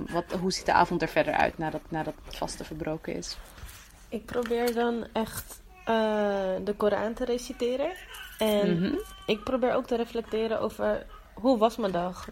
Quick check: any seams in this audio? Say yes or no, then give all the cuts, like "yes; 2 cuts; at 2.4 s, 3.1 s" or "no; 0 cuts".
yes; 1 cut; at 1.9 s